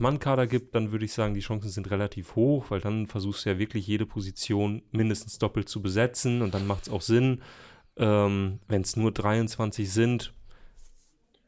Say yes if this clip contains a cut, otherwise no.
no